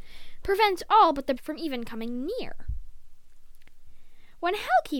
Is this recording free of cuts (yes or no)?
no